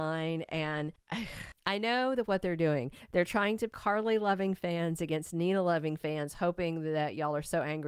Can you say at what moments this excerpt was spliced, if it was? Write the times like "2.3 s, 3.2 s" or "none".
3.7 s